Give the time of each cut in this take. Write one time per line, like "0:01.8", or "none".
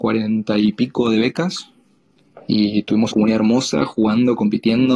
0:03.1